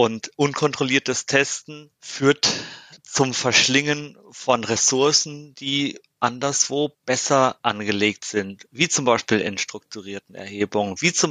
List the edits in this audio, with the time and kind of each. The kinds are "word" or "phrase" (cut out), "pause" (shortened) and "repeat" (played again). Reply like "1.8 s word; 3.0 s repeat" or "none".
2.0 s pause; 7.0 s pause